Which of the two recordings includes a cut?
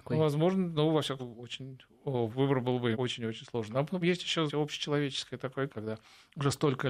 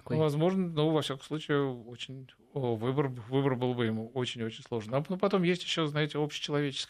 first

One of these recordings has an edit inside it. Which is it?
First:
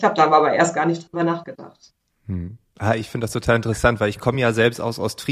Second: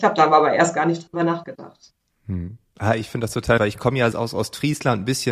second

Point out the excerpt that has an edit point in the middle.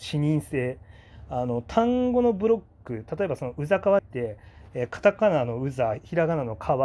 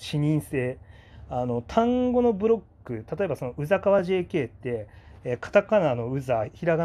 first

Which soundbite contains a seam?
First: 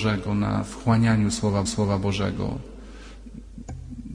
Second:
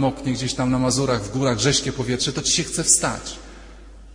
first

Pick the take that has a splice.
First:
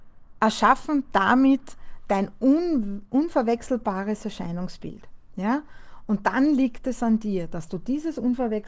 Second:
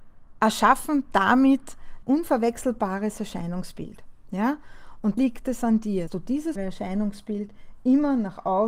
second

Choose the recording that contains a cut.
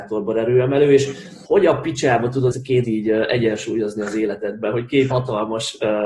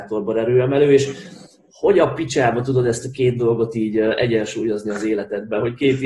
first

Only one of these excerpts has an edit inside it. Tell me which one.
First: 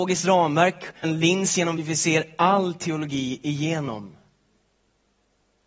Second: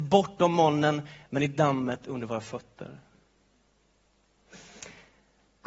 first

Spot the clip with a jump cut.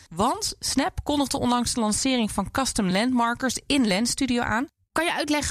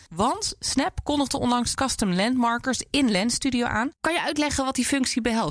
second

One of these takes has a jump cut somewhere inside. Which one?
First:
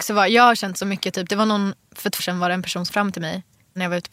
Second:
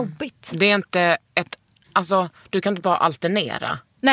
first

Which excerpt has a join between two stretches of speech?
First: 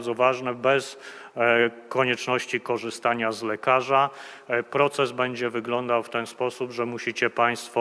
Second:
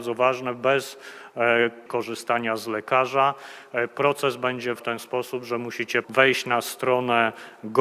second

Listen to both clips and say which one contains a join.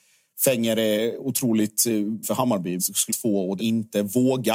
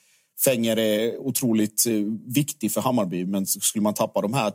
first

